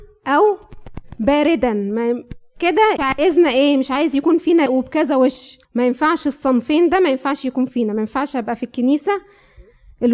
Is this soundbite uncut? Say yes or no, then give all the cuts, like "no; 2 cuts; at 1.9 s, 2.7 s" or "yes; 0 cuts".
no; 3 cuts; at 3.0 s, 4.7 s, 5.6 s